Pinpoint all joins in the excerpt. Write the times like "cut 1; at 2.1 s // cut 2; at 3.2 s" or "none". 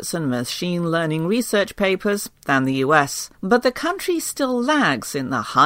cut 1; at 3.3 s